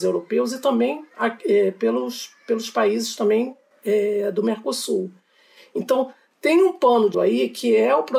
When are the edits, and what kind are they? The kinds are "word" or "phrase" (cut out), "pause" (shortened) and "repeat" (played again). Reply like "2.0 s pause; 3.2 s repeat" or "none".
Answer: 7.1 s word